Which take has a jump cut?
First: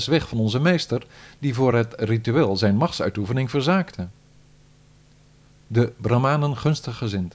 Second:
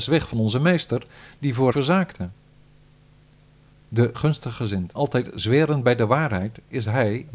second; 3 cuts; at 1.7 s, 4.1 s, 5.0 s

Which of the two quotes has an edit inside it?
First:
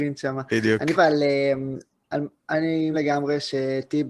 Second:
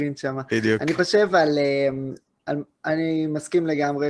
first; 2 cuts; at 0.9 s, 2.9 s

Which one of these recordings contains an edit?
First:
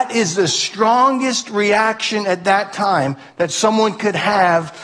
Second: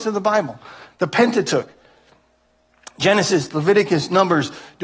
second; 1 cut; at 3.5 s

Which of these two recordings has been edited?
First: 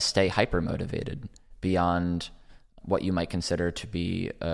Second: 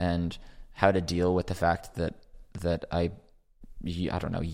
first; 1 cut; at 2.8 s

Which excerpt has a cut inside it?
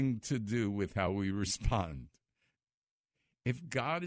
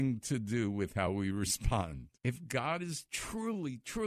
second; 1 cut; at 2.2 s

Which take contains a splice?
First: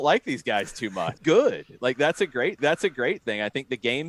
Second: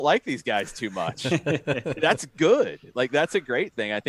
first; 2 cuts; at 1.2 s, 2.6 s

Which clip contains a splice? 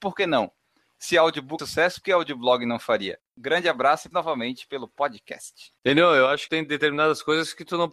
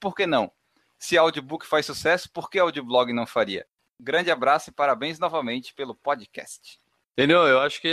first; 6 cuts; at 1.6 s, 2.0 s, 3.3 s, 4.1 s, 5.8 s, 6.5 s

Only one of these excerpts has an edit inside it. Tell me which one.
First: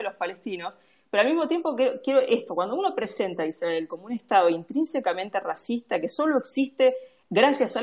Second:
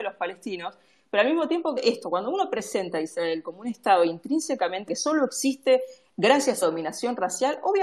second; 3 cuts; at 1.8 s, 4.9 s, 6.6 s

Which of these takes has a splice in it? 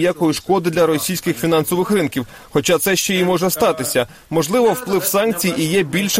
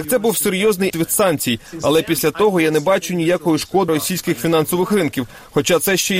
second; 2 cuts; at 0.9 s, 3.9 s

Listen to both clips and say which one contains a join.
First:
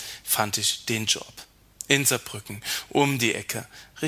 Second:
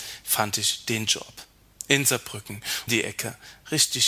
second; 1 cut; at 2.9 s

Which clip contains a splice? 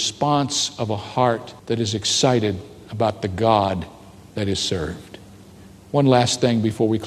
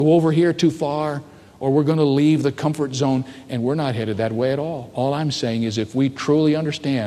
first; 1 cut; at 1.6 s

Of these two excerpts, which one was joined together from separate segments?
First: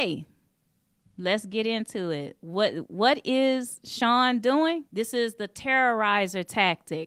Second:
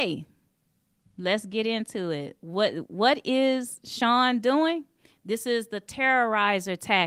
first; 1 cut; at 4.9 s

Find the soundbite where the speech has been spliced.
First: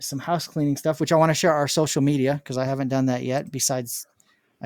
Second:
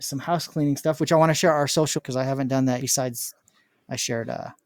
second; 2 cuts; at 2.0 s, 2.8 s

